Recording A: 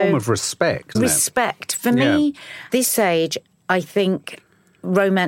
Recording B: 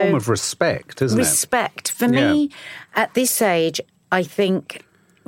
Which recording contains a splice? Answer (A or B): A